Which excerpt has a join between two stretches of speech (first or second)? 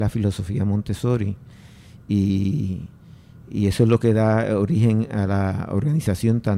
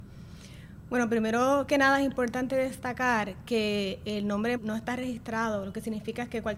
second